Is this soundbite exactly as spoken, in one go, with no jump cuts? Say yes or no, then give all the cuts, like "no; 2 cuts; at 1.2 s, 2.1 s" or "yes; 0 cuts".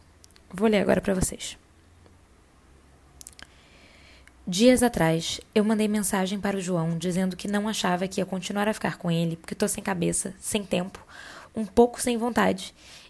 yes; 0 cuts